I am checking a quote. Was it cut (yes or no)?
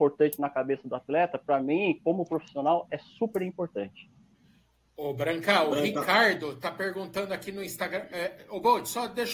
no